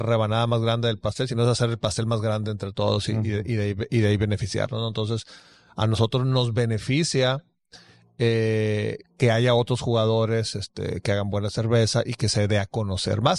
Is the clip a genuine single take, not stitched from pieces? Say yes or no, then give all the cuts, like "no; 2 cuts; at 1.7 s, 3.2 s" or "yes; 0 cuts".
yes; 0 cuts